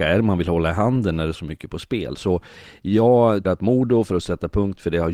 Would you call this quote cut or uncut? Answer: cut